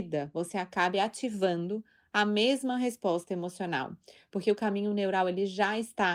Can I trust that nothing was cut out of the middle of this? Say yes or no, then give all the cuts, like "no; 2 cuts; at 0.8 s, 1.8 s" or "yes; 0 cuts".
yes; 0 cuts